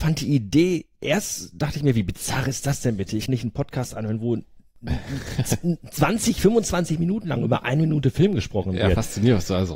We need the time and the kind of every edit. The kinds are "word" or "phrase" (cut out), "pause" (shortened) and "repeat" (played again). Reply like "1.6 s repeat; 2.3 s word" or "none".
3.3 s phrase